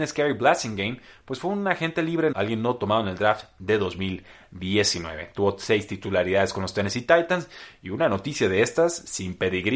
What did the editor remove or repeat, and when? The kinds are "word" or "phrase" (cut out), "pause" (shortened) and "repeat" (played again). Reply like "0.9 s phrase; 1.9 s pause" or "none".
2.3 s word